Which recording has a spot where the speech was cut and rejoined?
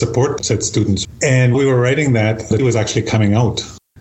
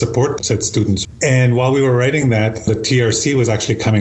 first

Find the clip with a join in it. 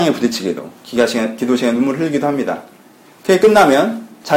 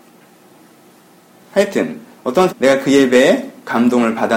second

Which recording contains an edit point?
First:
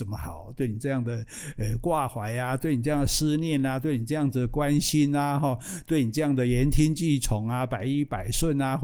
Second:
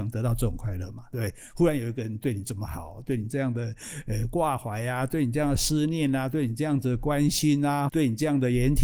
second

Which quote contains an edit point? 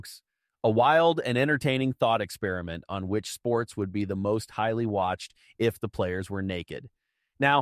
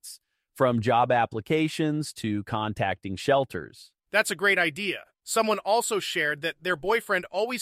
second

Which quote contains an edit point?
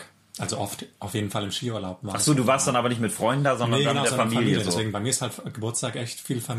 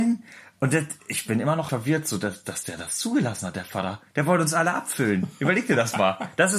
second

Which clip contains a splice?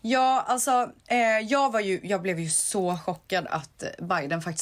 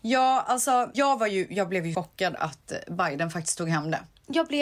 second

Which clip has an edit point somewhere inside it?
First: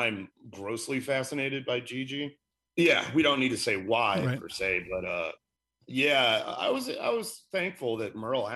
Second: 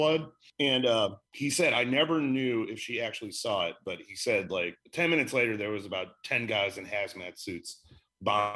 second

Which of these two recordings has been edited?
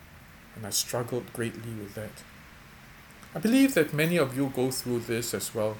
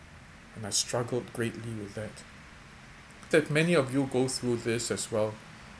second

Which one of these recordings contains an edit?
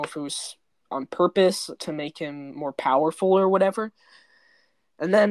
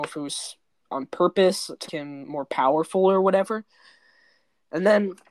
second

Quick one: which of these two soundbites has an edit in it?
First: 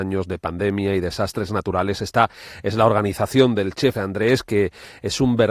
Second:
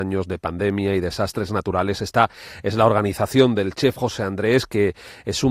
first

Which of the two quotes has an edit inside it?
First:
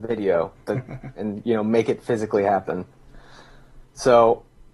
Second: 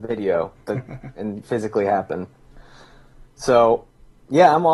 second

